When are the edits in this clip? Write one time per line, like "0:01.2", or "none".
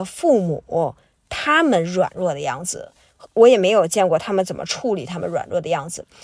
none